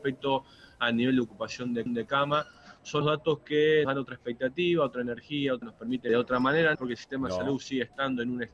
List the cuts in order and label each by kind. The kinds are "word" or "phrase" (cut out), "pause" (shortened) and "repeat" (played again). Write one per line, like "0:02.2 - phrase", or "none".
0:01.9 - repeat
0:03.0 - word
0:03.8 - word
0:05.6 - word
0:06.1 - phrase
0:06.7 - phrase